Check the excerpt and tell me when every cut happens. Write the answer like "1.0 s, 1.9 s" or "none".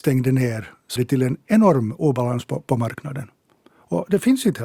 1.0 s